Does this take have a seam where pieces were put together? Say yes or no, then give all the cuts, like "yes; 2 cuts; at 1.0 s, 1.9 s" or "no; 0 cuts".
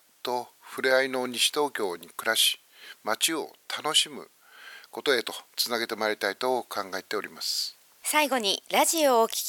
yes; 1 cut; at 5.5 s